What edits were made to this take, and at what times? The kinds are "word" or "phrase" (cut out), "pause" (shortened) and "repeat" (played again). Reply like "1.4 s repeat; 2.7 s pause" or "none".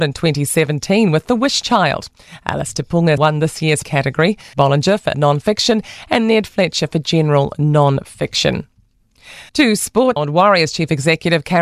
3.2 s word; 3.8 s word; 4.5 s word; 5.1 s word; 9.5 s pause; 10.2 s word